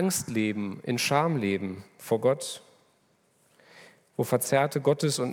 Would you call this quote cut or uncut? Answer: uncut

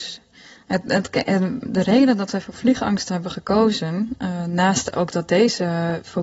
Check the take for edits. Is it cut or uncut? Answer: uncut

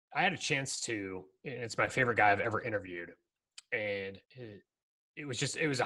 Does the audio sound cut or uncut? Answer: cut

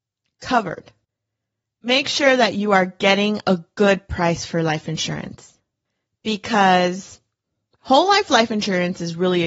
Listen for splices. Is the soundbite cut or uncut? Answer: uncut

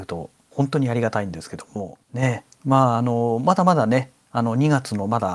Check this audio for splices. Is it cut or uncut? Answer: cut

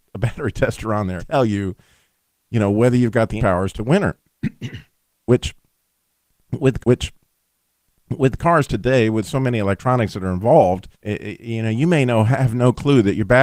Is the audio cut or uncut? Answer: cut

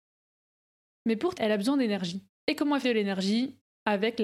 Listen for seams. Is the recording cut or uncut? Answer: cut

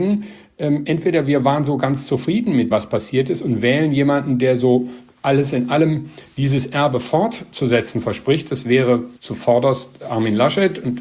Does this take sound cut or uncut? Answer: cut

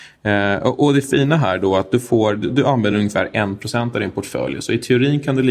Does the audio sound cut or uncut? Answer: uncut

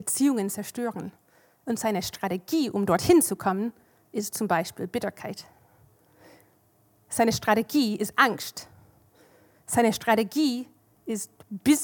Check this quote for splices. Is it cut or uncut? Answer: uncut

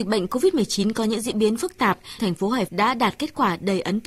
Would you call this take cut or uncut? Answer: cut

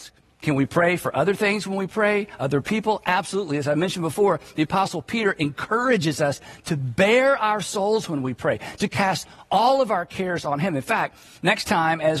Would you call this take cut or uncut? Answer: uncut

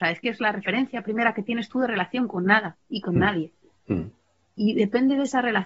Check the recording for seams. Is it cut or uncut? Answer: uncut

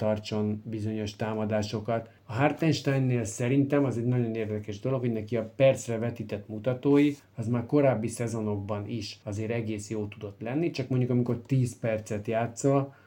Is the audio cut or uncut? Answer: uncut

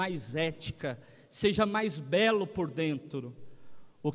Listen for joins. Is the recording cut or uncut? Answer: uncut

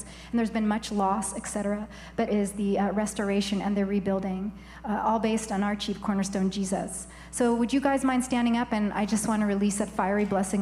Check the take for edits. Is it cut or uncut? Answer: cut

